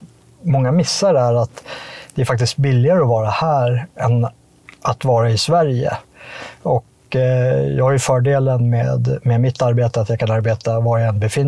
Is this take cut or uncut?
uncut